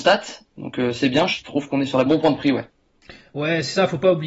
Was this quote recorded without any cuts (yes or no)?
no